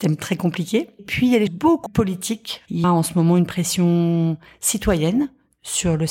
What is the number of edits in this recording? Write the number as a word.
four